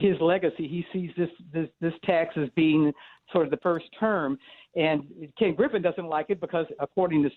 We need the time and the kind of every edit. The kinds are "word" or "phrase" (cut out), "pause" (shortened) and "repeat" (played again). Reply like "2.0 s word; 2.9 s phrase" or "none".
3.6 s phrase